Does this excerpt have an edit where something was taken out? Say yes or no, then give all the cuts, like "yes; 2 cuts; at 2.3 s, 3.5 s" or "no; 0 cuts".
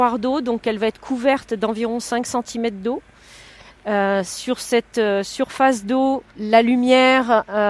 yes; 1 cut; at 6.3 s